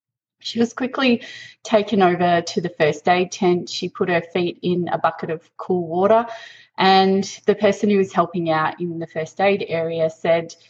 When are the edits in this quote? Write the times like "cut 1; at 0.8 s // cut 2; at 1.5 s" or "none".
none